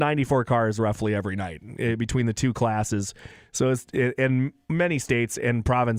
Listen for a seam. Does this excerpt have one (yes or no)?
no